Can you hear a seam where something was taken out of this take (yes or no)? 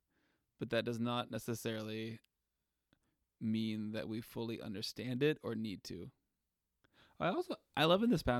no